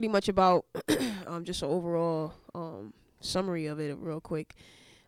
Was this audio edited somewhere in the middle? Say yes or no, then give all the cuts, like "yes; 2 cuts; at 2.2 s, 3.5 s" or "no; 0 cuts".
no; 0 cuts